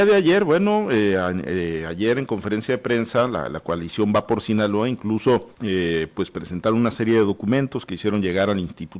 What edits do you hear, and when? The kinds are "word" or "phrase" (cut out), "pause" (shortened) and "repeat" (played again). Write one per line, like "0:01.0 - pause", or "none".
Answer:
0:05.5 - pause